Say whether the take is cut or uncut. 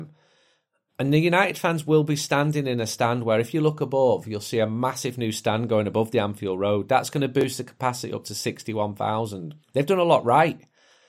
cut